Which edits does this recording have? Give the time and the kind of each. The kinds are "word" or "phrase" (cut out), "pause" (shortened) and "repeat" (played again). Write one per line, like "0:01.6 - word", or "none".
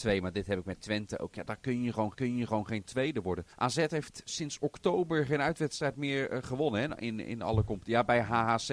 0:01.4 - word
0:02.1 - repeat
0:03.5 - pause
0:04.3 - word